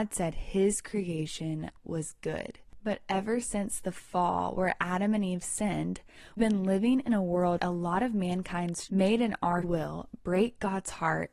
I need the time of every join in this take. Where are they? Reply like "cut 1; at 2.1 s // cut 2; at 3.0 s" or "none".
cut 1; at 6.4 s // cut 2; at 7.6 s // cut 3; at 8.9 s // cut 4; at 9.6 s